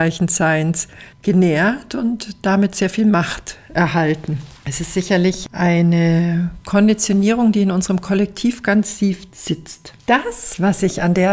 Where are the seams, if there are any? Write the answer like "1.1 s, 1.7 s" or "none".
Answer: 1.1 s, 4.6 s, 10.0 s